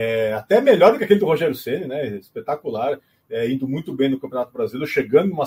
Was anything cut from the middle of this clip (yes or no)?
no